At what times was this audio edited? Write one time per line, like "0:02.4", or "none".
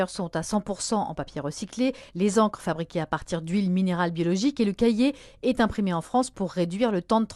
none